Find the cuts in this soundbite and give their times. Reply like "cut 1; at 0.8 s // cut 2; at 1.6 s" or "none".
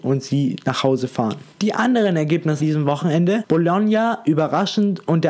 cut 1; at 1.5 s // cut 2; at 2.6 s